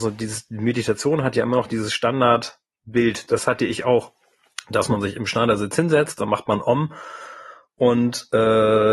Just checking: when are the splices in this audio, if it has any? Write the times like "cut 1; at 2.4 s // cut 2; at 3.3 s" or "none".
none